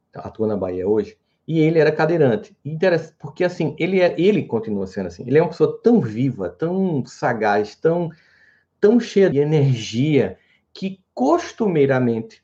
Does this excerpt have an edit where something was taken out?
yes; 1 cut; at 9.3 s

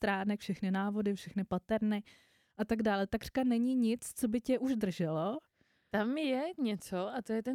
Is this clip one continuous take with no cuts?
yes; 0 cuts

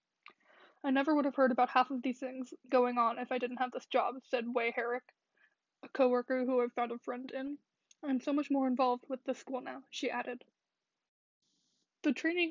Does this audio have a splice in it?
no; 0 cuts

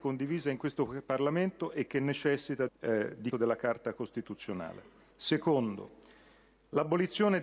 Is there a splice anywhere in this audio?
yes; 3 cuts; at 2.7 s, 3.3 s, 5.1 s

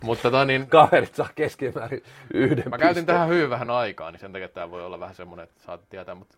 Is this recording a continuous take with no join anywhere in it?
yes; 0 cuts

